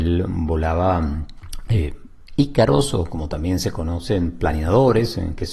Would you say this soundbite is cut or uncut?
uncut